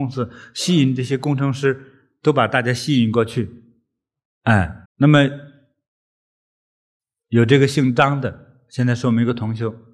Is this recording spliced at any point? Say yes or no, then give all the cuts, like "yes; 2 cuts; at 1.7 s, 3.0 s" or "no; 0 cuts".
yes; 1 cut; at 4.9 s